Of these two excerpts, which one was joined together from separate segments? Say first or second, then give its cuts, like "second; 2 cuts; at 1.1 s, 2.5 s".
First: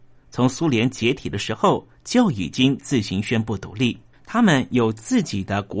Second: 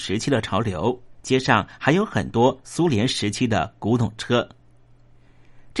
second; 1 cut; at 1.2 s